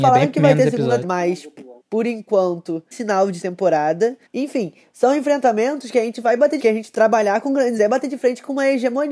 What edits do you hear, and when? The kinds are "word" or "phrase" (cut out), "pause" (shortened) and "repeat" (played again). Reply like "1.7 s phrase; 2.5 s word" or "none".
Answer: 1.0 s word; 1.8 s pause; 2.9 s phrase; 3.4 s word; 4.3 s pause; 6.6 s phrase; 7.8 s word